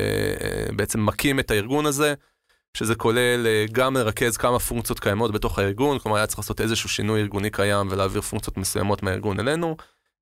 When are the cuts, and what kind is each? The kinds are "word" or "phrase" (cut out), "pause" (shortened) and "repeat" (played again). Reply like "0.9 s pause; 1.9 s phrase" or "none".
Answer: none